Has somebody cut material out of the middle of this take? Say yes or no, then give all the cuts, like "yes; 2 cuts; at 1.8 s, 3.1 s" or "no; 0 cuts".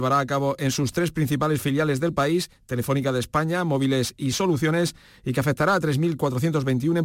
no; 0 cuts